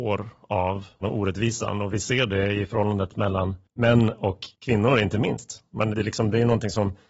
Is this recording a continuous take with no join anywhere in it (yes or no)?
no